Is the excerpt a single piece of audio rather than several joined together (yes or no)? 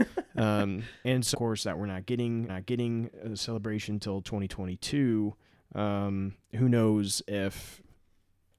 no